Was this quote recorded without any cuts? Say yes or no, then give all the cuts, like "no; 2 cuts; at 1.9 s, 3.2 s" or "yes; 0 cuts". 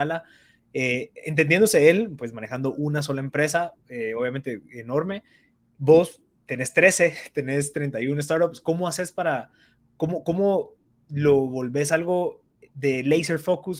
no; 1 cut; at 3.8 s